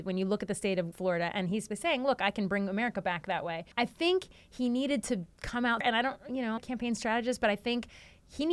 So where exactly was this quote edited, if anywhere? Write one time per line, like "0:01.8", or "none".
0:00.9
0:01.7
0:03.7
0:05.3
0:05.8
0:06.6